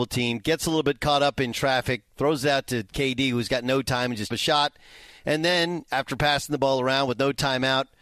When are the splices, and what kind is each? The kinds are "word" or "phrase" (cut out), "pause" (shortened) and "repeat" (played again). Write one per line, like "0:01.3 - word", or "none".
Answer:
0:04.3 - phrase